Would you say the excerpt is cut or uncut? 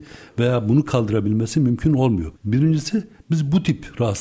cut